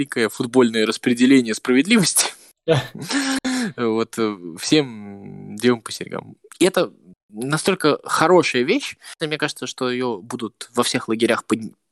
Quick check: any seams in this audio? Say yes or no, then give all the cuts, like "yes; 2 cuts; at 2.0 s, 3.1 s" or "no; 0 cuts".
yes; 1 cut; at 9.2 s